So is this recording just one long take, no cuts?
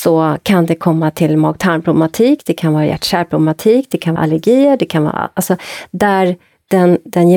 no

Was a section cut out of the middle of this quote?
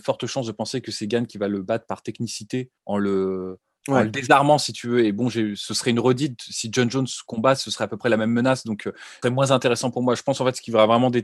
yes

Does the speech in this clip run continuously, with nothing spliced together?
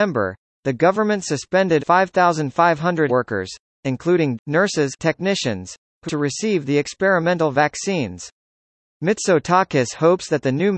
no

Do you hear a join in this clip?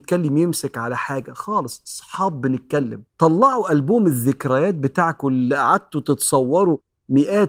yes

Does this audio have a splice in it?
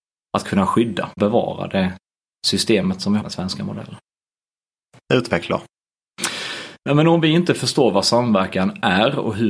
yes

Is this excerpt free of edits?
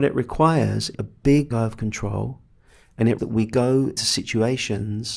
no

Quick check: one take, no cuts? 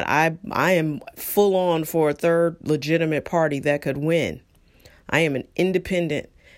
yes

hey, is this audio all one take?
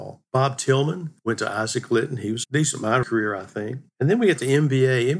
no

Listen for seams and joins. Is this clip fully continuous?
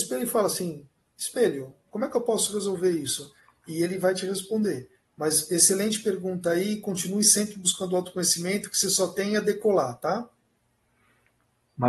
yes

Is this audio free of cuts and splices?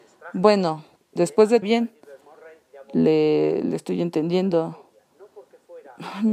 no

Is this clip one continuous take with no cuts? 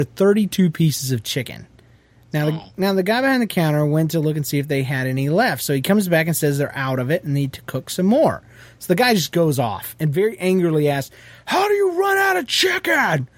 yes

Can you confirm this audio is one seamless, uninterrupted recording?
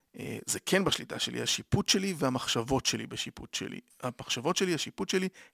yes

